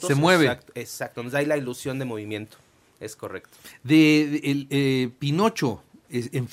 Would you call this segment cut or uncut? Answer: uncut